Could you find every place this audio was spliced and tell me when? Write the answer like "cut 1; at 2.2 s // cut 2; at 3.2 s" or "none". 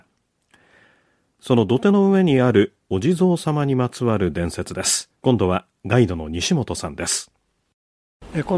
cut 1; at 5.1 s